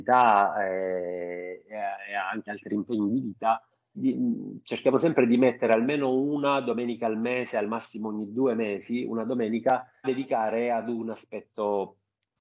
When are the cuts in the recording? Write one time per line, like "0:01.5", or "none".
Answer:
0:02.5
0:03.9
0:10.0